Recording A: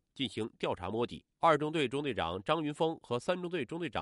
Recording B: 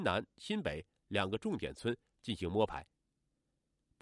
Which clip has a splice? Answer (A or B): A